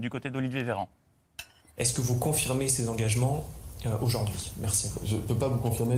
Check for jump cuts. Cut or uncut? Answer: uncut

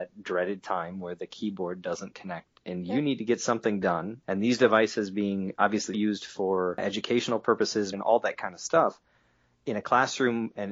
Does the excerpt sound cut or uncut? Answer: cut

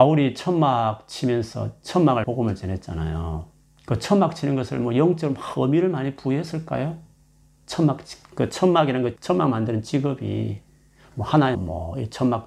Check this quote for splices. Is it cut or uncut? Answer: cut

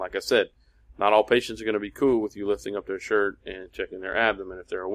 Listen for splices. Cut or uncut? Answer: uncut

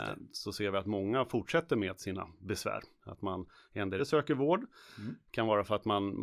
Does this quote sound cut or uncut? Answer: cut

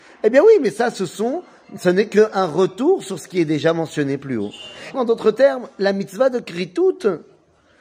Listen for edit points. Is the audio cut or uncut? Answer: cut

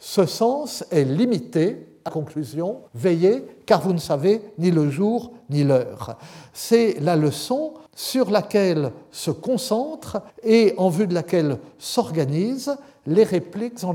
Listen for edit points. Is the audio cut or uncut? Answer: cut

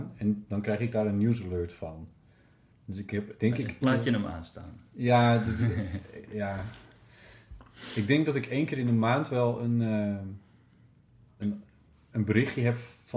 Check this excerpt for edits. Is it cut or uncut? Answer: cut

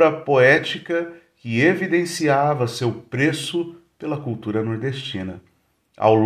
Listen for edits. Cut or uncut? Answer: uncut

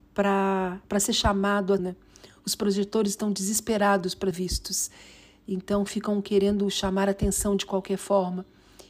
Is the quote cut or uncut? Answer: cut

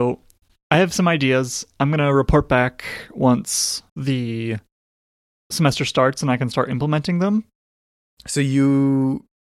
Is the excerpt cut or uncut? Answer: cut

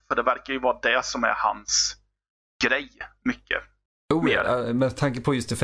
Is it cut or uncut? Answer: uncut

